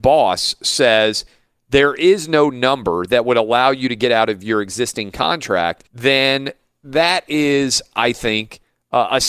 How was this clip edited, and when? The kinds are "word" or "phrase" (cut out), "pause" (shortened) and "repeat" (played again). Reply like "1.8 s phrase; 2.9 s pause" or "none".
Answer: 5.9 s pause